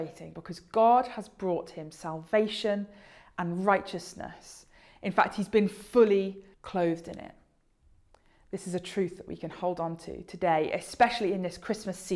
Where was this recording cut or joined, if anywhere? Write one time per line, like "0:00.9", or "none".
0:06.5